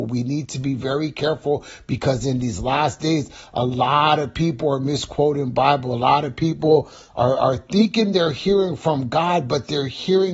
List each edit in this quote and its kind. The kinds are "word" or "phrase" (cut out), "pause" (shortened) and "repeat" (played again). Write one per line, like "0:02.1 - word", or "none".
none